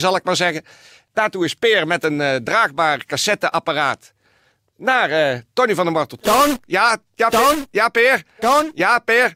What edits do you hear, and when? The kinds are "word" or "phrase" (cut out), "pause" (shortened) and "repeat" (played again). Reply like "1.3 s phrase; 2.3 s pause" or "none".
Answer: none